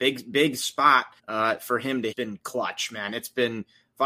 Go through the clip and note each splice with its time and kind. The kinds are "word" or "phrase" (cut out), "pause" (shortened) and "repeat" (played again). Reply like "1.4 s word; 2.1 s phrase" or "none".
1.2 s pause; 2.1 s phrase